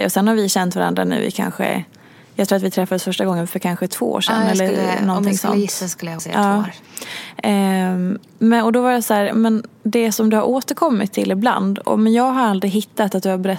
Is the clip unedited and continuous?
no; 1 cut; at 6.2 s

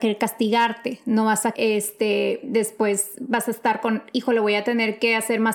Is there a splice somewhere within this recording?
yes; 1 cut; at 1.5 s

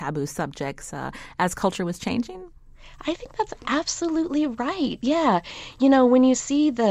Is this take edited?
no; 0 cuts

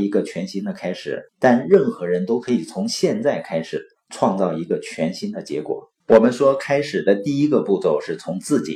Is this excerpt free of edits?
no; 2 cuts; at 1.3 s, 6.0 s

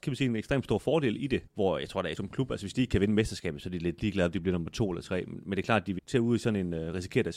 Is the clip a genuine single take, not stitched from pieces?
no; 3 cuts; at 1.5 s, 2.2 s, 6.0 s

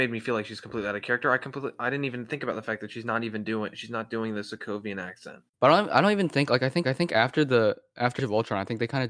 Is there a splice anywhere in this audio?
yes; 3 cuts; at 5.5 s, 6.8 s, 8.2 s

